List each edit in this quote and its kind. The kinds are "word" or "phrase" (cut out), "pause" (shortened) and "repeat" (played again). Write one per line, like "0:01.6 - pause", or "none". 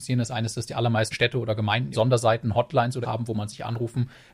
0:01.1 - word
0:01.9 - word
0:03.0 - word